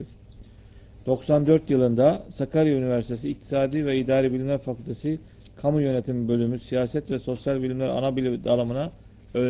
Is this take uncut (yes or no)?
yes